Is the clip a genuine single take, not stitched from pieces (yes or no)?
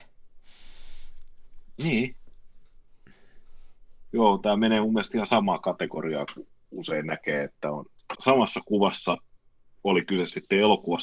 no